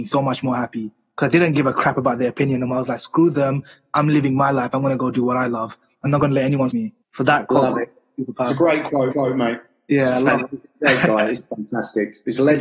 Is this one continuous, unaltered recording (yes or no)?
no